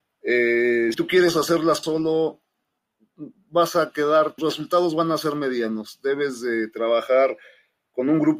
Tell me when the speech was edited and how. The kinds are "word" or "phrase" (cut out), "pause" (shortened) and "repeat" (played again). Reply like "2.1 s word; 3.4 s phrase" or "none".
0.9 s word; 1.8 s word; 4.4 s word